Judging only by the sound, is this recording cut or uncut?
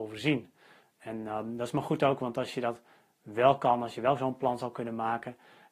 uncut